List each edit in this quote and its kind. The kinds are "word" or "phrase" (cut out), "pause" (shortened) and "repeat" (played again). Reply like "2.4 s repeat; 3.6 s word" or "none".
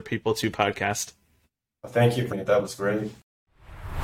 2.3 s word

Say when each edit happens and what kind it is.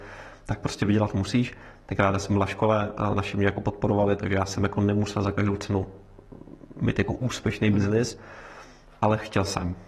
none

